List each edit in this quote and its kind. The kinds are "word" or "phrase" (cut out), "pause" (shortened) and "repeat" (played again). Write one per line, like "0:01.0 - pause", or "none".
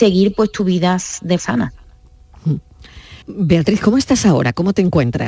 0:01.4 - word
0:03.2 - pause